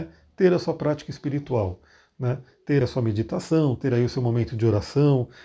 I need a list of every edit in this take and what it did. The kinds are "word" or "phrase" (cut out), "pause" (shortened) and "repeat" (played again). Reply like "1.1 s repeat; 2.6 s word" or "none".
2.8 s word